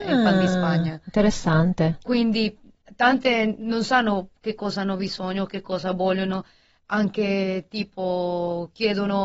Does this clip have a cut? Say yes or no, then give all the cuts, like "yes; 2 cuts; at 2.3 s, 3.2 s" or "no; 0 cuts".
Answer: no; 0 cuts